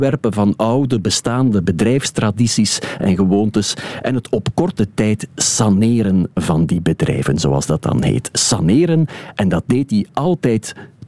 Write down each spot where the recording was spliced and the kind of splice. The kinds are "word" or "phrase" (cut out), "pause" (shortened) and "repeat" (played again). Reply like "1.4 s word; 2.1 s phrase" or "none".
none